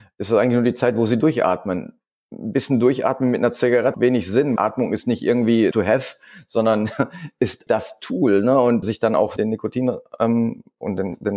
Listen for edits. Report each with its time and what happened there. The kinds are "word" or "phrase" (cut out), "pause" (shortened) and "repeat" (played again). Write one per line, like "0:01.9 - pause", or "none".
0:03.9 - word
0:04.6 - word
0:05.7 - word
0:07.7 - word
0:08.8 - word
0:09.4 - word